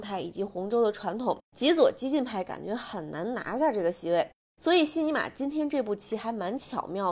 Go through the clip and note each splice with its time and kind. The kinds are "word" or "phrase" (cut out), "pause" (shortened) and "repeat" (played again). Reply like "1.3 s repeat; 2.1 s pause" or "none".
1.5 s pause